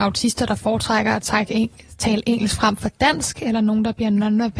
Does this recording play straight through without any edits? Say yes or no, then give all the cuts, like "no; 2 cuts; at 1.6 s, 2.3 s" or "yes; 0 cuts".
yes; 0 cuts